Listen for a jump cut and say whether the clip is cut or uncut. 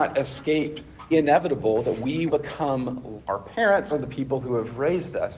cut